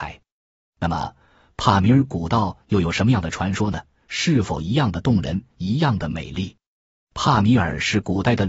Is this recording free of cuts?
yes; 0 cuts

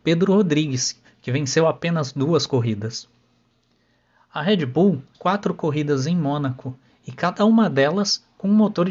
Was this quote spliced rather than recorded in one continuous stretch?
yes; 1 cut; at 5.1 s

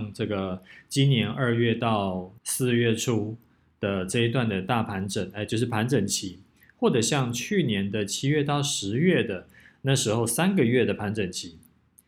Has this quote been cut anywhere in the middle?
yes; 1 cut; at 2.4 s

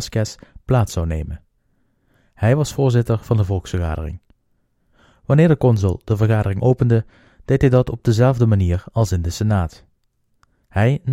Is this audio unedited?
yes; 0 cuts

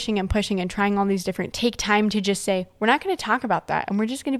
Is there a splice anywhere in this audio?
yes; 1 cut; at 1.5 s

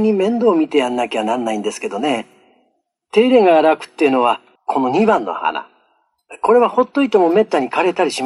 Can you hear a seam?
yes; 1 cut; at 4.6 s

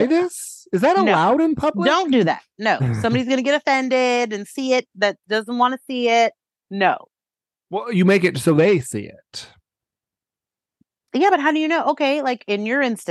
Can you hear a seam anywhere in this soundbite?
yes; 1 cut; at 6.4 s

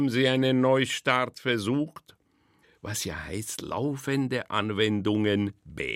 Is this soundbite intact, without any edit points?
yes; 0 cuts

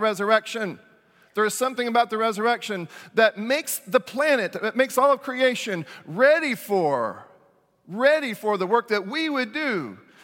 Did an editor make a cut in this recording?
no; 0 cuts

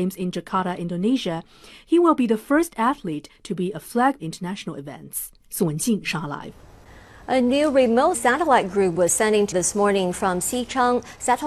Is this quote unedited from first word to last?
no; 4 cuts; at 4.2 s, 5.4 s, 8.1 s, 9.5 s

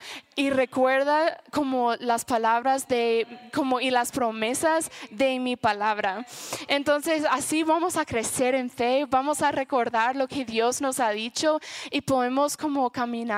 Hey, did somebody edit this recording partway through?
no; 0 cuts

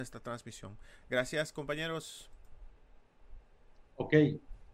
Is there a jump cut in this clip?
no; 0 cuts

